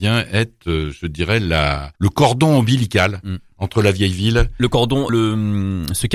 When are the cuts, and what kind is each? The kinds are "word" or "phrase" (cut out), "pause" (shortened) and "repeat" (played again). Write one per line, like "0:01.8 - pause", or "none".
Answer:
0:02.0 - pause
0:05.1 - word